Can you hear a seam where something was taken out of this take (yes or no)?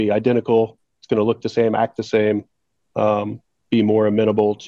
no